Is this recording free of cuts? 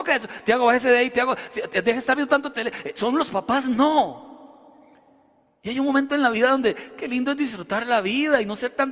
yes; 0 cuts

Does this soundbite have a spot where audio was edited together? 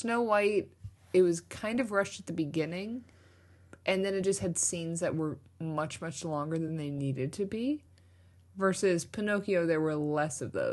no; 0 cuts

